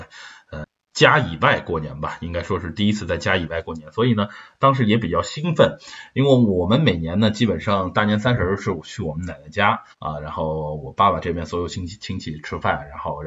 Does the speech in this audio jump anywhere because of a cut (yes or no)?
yes